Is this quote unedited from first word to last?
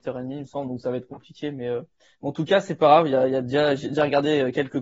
yes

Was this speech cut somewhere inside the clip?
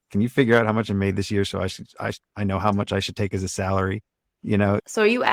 no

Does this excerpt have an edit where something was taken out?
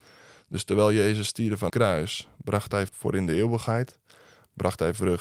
yes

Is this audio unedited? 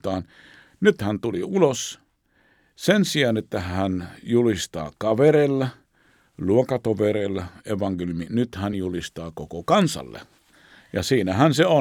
yes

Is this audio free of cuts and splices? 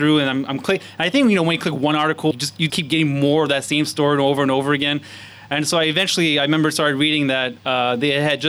no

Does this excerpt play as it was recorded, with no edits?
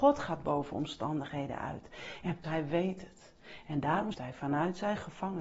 no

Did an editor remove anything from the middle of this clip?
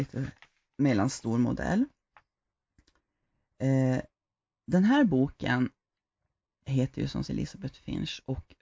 yes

